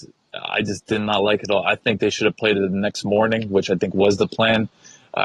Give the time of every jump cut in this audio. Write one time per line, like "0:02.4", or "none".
none

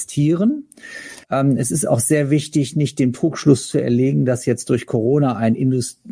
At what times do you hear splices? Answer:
0:01.2

